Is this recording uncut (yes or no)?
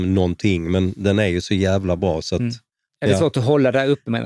yes